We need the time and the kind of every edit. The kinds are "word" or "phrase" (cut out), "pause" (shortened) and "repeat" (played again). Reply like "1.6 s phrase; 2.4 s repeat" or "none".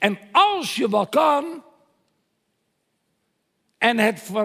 1.1 s phrase